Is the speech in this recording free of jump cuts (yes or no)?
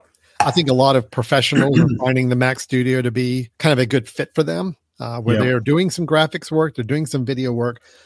no